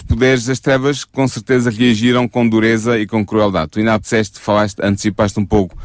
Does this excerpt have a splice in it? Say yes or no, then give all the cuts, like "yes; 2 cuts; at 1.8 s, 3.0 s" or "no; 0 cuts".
yes; 1 cut; at 4.0 s